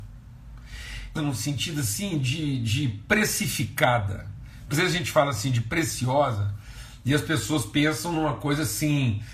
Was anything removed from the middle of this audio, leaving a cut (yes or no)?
yes